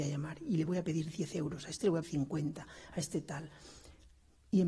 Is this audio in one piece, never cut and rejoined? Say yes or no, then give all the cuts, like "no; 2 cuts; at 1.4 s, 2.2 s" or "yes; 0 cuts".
no; 1 cut; at 2.0 s